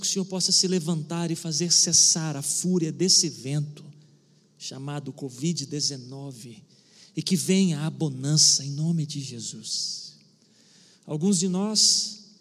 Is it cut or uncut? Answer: uncut